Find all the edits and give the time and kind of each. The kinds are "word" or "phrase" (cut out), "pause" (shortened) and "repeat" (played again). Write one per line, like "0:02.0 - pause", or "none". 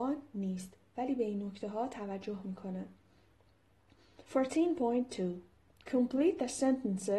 0:04.2 - pause